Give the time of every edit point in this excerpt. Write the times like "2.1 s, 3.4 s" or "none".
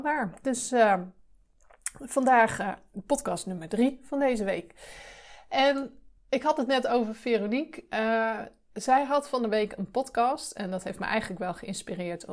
6.2 s